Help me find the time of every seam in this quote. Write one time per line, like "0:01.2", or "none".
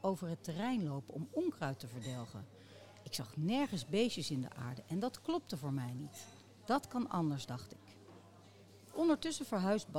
none